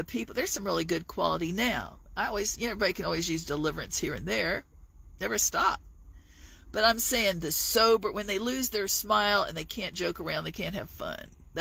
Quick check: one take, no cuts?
yes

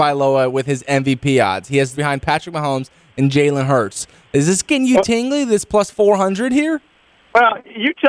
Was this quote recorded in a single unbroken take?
no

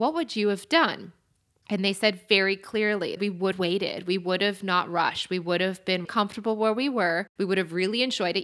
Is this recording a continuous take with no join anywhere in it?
no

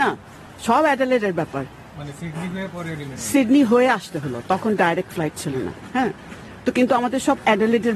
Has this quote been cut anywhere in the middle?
no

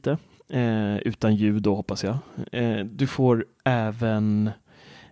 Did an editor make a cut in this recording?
no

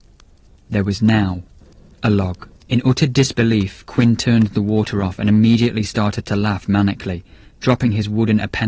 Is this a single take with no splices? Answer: no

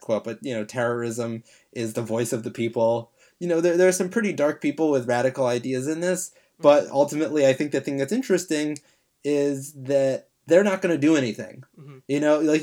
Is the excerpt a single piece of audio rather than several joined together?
yes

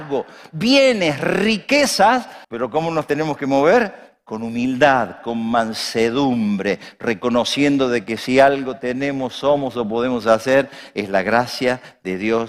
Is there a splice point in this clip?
yes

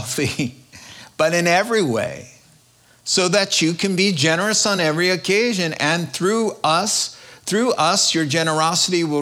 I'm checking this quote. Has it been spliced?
no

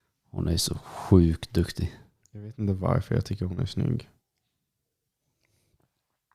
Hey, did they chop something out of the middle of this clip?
no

